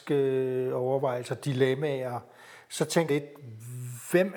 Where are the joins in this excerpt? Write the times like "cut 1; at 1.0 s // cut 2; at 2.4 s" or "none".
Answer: cut 1; at 3.1 s